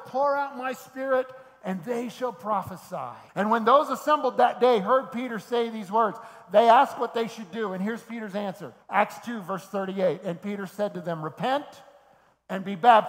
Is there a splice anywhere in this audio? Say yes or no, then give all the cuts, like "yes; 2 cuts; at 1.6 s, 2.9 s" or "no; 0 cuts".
yes; 2 cuts; at 3.3 s, 8.8 s